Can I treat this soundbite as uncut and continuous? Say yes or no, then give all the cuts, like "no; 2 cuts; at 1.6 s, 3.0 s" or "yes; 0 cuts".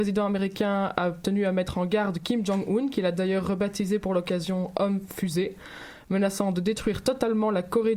yes; 0 cuts